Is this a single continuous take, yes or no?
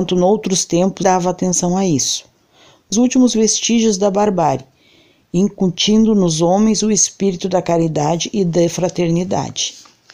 no